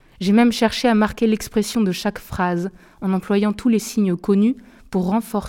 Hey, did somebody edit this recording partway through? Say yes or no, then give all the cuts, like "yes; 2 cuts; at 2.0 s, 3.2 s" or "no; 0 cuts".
no; 0 cuts